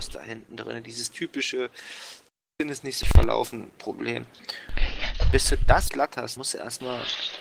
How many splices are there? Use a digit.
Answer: 3